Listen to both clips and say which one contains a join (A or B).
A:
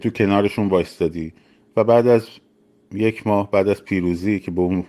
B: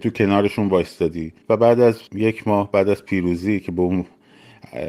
B